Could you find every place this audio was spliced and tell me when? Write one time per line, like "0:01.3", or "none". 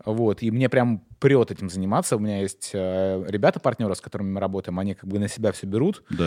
none